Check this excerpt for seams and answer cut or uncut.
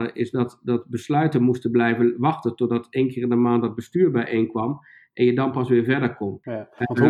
uncut